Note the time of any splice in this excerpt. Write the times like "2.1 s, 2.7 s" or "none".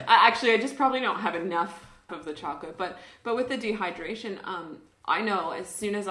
2.1 s